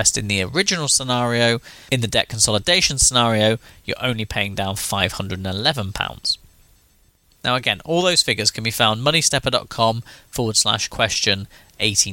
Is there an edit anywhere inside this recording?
no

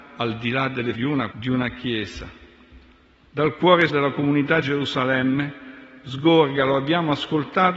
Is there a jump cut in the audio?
yes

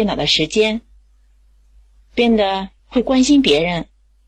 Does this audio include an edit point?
yes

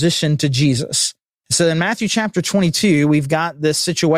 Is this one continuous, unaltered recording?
yes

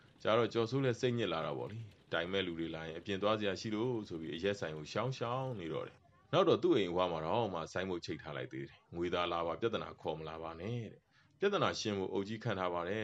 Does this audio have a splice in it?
no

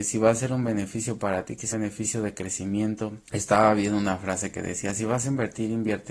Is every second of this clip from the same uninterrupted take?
no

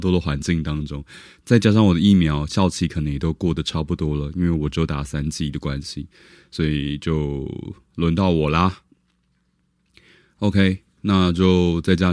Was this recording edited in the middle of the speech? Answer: no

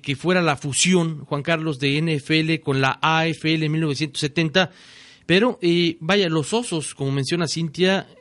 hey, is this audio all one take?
yes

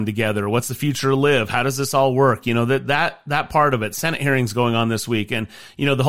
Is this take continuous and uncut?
yes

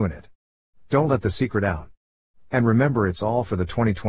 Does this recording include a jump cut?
no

